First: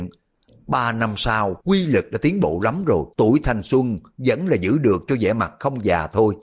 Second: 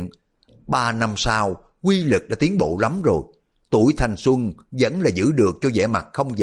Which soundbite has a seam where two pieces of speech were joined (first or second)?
first